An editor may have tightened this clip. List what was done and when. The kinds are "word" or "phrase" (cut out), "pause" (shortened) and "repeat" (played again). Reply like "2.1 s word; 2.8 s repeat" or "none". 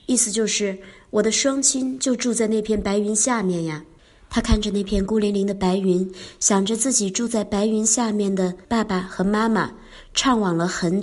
8.6 s pause